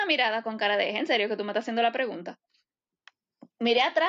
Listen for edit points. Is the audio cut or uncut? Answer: uncut